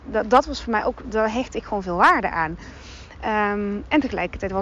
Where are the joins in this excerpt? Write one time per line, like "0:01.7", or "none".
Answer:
none